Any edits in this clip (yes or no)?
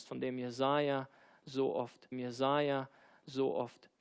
yes